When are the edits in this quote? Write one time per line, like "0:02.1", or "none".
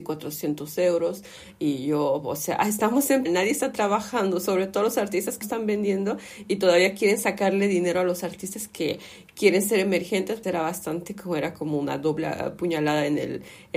0:03.3
0:05.4
0:10.4